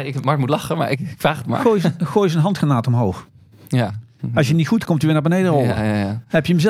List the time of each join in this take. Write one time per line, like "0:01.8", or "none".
0:04.8